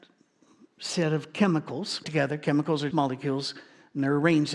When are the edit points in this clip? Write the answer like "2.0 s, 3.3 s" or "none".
2.0 s, 2.9 s